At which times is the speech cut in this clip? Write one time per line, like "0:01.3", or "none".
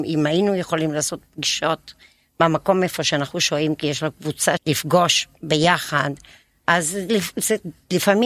0:04.6